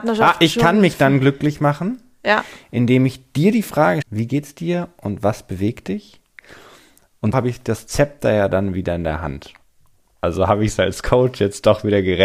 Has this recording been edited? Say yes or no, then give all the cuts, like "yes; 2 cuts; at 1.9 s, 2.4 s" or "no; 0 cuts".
yes; 2 cuts; at 4.0 s, 7.3 s